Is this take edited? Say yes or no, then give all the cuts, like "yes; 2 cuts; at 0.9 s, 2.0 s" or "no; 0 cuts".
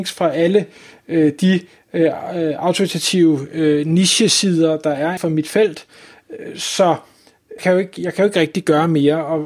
yes; 2 cuts; at 5.2 s, 7.6 s